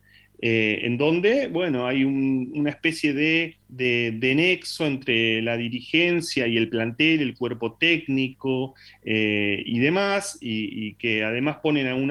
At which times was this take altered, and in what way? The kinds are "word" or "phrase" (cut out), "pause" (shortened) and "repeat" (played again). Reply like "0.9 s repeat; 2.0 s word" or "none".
3.6 s pause